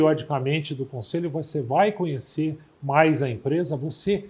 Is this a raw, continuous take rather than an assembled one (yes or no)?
yes